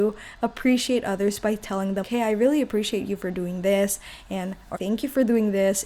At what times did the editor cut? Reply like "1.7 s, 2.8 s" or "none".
2.0 s, 4.7 s